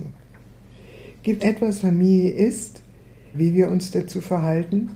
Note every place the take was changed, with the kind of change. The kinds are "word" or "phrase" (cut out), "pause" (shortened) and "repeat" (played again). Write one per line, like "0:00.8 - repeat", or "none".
0:01.4 - word
0:01.8 - word
0:03.3 - word